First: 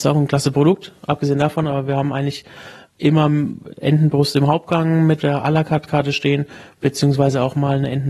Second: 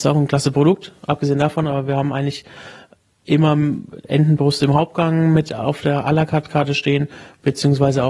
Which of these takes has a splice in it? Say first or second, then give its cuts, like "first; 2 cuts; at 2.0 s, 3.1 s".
first; 2 cuts; at 2.9 s, 5.2 s